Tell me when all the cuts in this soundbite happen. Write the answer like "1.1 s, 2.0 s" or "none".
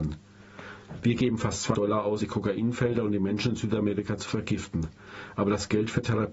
1.7 s, 2.2 s